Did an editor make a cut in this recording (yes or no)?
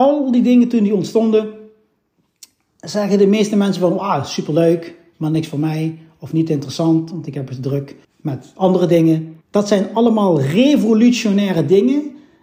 yes